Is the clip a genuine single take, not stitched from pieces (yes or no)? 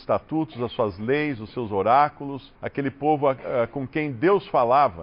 no